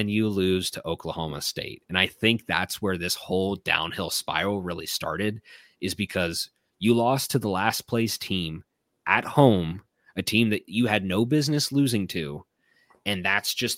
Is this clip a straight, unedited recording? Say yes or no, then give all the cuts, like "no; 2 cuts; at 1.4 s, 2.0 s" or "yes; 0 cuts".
yes; 0 cuts